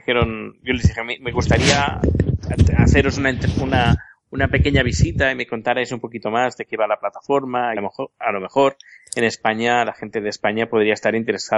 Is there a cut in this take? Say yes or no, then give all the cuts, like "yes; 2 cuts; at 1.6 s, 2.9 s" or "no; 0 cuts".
yes; 1 cut; at 7.8 s